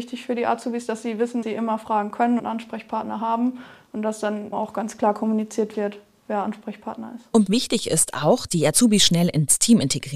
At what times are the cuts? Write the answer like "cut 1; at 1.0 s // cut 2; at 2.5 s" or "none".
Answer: cut 1; at 1.4 s // cut 2; at 2.4 s // cut 3; at 4.5 s // cut 4; at 7.5 s // cut 5; at 8.5 s